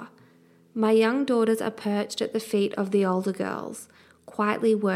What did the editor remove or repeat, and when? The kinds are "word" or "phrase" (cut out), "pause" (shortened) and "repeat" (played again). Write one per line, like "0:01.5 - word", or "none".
none